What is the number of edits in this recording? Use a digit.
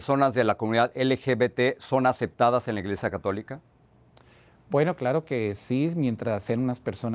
0